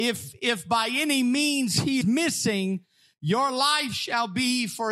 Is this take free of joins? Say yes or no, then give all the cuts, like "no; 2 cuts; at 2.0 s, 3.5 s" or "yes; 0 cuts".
no; 1 cut; at 2.0 s